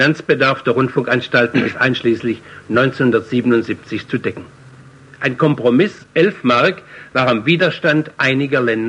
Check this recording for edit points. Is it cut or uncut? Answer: uncut